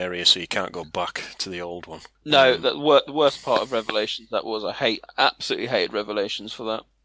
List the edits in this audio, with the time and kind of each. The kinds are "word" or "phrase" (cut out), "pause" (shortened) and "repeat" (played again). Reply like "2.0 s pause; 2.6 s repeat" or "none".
none